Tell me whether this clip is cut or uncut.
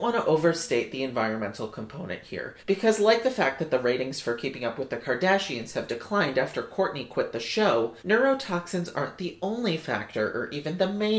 cut